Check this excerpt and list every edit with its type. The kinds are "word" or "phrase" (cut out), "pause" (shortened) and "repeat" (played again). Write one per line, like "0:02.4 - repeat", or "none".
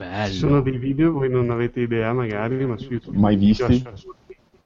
none